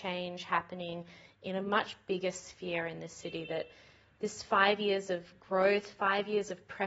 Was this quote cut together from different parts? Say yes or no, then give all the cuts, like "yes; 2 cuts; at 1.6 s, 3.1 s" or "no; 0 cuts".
no; 0 cuts